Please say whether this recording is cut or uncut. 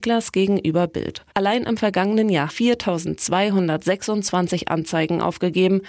cut